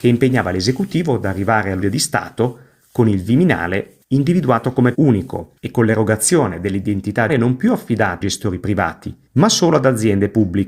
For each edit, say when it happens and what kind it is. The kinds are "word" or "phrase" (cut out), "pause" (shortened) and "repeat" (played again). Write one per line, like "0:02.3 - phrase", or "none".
0:01.8 - word
0:04.0 - pause
0:04.9 - word
0:05.6 - pause
0:07.3 - word
0:08.2 - word
0:09.3 - pause